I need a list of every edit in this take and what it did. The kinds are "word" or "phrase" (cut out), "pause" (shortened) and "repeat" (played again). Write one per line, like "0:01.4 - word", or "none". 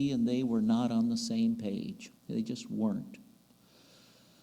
0:02.2 - pause